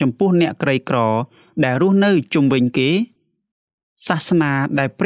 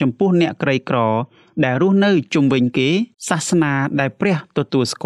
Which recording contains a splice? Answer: second; 1 cut; at 3.1 s

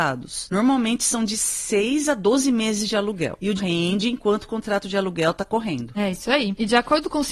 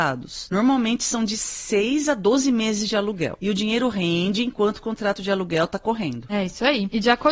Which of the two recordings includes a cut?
first; 1 cut; at 3.6 s

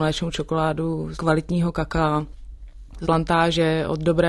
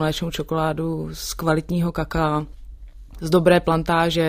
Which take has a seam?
first; 2 cuts; at 1.1 s, 3.0 s

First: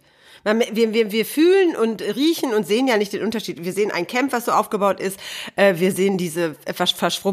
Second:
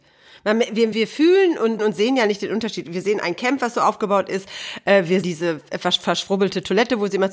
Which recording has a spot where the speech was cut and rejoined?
second; 3 cuts; at 0.9 s, 1.8 s, 5.2 s

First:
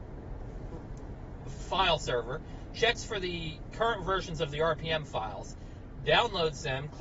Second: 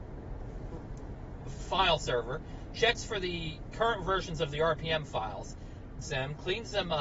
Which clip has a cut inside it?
second; 1 cut; at 6.0 s

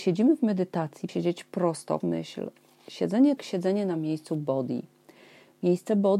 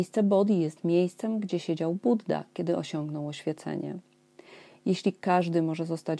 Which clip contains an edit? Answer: first; 3 cuts; at 1.1 s, 2.0 s, 3.4 s

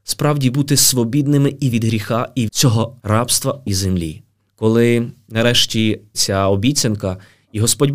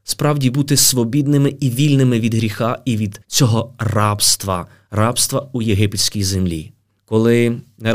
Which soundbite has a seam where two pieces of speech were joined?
first; 5 cuts; at 1.7 s, 2.5 s, 3.0 s, 3.7 s, 6.1 s

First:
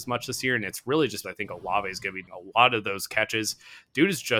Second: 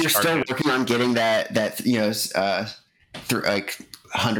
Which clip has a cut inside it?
first; 2 cuts; at 1.2 s, 2.3 s

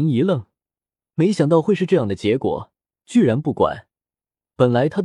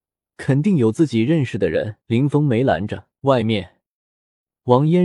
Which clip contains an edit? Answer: second; 2 cuts; at 2.0 s, 3.2 s

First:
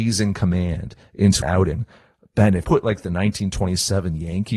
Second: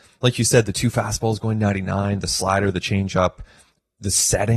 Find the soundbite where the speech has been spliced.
first; 2 cuts; at 1.4 s, 2.6 s

